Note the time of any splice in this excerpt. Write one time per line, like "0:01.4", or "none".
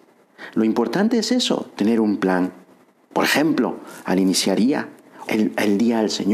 0:04.6
0:05.2